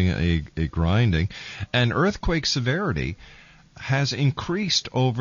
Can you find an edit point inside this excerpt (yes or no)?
no